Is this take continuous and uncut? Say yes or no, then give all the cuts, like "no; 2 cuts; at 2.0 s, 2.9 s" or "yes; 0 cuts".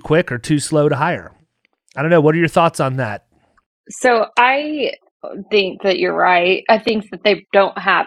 yes; 0 cuts